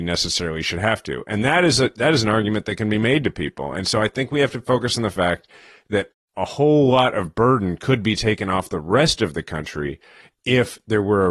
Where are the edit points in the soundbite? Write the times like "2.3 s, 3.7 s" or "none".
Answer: none